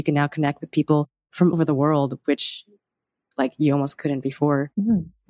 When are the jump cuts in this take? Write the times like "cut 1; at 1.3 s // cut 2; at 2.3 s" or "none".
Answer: cut 1; at 1.5 s